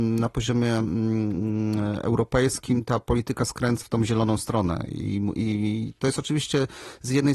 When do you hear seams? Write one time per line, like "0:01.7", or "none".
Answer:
0:03.8

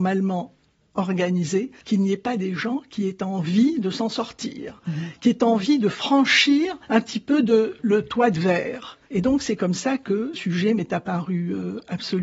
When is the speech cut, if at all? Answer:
0:01.8
0:06.8
0:07.8
0:09.0
0:10.3

